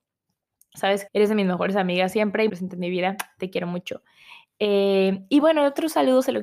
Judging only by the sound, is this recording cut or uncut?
cut